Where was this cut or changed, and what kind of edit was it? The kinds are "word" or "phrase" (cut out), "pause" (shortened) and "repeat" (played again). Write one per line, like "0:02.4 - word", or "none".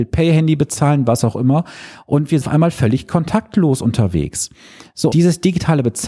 0:02.4 - word
0:05.1 - word